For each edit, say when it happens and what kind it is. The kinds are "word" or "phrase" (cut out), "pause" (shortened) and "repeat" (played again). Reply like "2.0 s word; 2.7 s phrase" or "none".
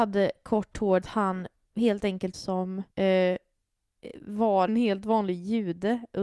1.0 s phrase; 2.3 s phrase; 2.9 s pause; 4.7 s word